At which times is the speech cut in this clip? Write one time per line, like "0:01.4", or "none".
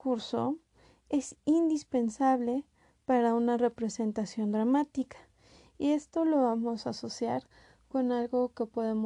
none

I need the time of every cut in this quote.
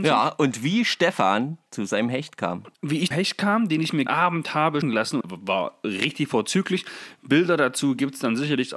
0:01.7
0:02.7
0:03.1
0:04.1
0:04.8
0:05.2

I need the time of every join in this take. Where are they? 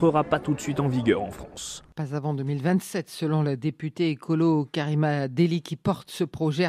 0:01.9

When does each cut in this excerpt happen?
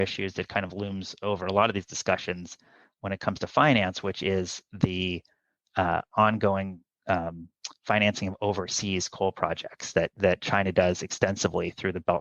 none

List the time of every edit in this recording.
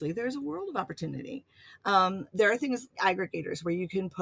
0:02.9

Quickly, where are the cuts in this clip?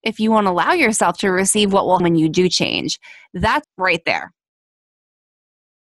0:02.0
0:03.6

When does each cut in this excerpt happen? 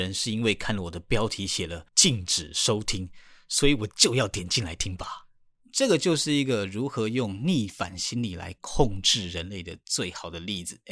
0:01.9

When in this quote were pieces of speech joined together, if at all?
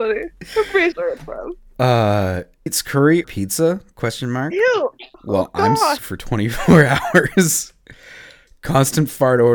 0:00.9
0:02.7
0:03.2
0:05.1
0:06.0

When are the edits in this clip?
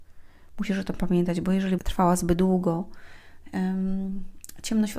0:01.8

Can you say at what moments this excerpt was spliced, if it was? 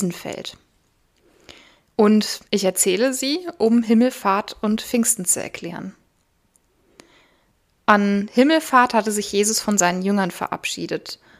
0:02.5

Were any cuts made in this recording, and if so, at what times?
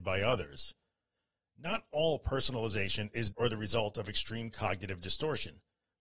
0:03.3

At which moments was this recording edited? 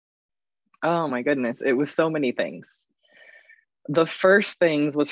none

